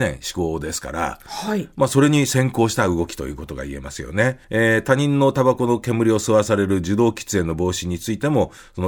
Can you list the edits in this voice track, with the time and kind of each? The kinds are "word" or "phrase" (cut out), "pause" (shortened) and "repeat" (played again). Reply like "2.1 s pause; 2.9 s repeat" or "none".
4.4 s pause